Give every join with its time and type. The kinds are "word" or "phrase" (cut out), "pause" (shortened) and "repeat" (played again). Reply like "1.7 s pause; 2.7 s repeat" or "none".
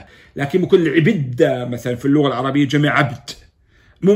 none